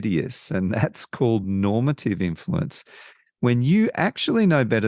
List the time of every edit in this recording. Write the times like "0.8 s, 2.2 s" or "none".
none